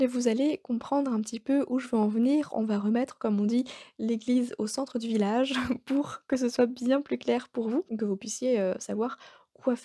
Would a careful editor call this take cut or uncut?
cut